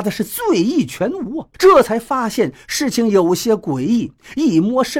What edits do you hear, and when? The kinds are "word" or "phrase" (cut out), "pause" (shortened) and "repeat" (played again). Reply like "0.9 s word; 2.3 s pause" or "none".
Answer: 1.5 s pause

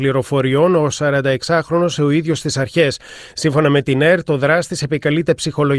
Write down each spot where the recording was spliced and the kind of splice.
2.0 s word

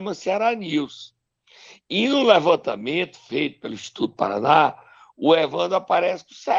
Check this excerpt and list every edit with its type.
none

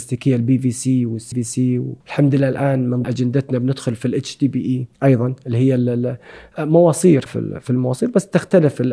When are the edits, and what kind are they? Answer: 1.3 s word; 2.0 s pause; 3.0 s word; 4.9 s pause; 7.3 s word

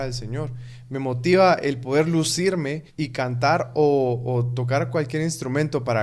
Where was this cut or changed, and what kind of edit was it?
2.9 s pause

